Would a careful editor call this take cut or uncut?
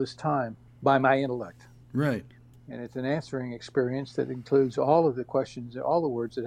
uncut